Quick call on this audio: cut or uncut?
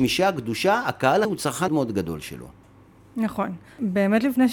cut